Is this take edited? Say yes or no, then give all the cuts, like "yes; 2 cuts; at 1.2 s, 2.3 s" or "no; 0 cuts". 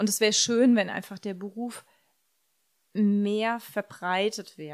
no; 0 cuts